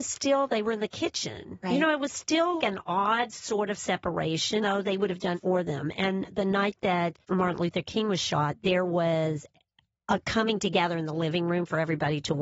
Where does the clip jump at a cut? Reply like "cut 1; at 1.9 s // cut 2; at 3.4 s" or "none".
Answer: cut 1; at 2.6 s // cut 2; at 4.6 s // cut 3; at 5.3 s // cut 4; at 7.2 s